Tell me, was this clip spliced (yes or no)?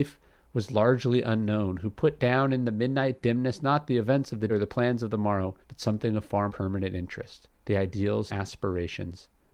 yes